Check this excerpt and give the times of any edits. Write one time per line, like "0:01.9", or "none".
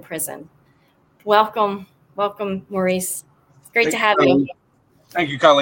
none